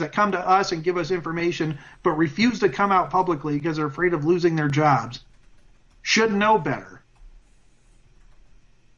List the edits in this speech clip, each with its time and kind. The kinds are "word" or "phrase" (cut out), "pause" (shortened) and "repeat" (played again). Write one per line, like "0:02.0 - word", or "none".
none